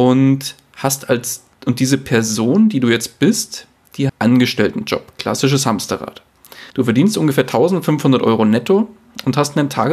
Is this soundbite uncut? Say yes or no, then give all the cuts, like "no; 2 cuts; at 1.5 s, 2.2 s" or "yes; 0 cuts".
no; 3 cuts; at 1.5 s, 4.1 s, 6.7 s